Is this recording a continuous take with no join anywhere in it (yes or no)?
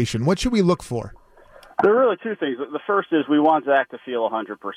yes